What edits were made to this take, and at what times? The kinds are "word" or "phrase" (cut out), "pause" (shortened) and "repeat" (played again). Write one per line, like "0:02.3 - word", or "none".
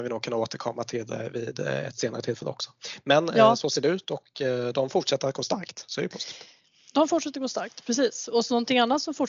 none